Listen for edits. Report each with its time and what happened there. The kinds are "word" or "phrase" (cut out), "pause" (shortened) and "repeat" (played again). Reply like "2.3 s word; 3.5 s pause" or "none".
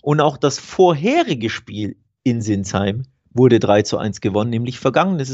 none